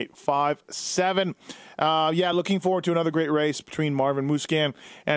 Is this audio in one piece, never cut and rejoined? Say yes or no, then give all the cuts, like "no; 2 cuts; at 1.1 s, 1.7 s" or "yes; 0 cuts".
yes; 0 cuts